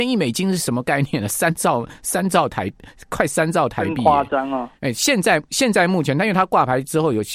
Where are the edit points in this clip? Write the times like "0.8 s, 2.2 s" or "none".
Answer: 4.8 s